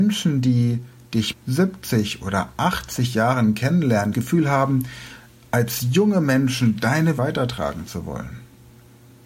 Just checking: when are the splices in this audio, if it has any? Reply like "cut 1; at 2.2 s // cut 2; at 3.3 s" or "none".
cut 1; at 1.3 s // cut 2; at 4.1 s // cut 3; at 7.2 s